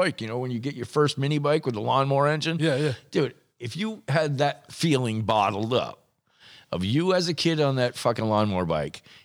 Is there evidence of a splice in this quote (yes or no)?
no